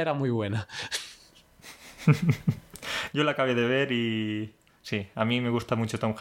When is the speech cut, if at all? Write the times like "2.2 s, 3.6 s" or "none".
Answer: none